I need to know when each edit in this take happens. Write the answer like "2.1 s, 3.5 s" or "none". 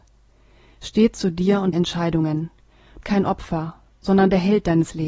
1.7 s, 3.0 s

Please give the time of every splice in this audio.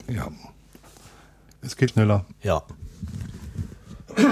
1.9 s

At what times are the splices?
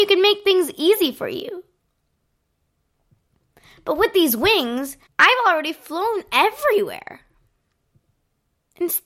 5.1 s

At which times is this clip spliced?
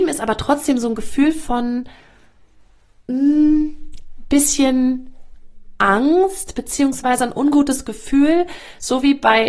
none

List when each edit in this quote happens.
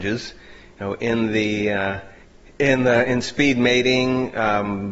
2.2 s

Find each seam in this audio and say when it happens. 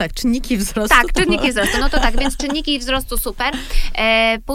none

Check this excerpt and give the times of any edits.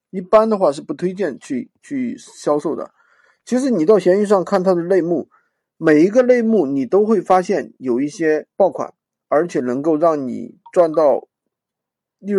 1.8 s, 8.5 s

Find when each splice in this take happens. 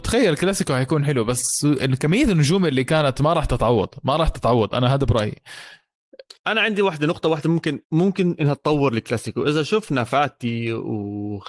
6.4 s, 7.8 s

